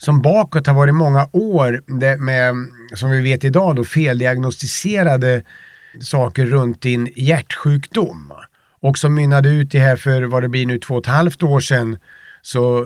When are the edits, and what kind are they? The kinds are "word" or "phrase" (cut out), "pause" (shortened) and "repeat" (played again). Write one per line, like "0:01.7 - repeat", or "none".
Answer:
0:02.2 - word
0:05.9 - word